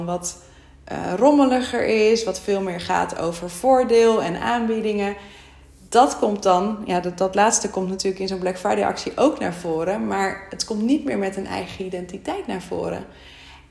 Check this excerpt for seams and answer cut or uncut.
uncut